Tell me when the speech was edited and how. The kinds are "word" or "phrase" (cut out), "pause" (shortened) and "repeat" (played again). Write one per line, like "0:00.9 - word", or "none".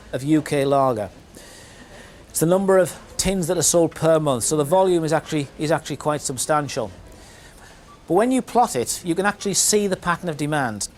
none